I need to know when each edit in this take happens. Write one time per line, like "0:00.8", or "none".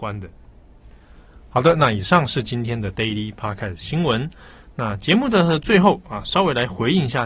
none